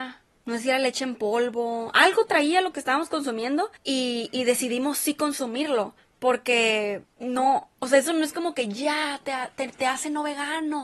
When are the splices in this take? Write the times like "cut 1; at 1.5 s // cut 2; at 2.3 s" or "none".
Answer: cut 1; at 6.0 s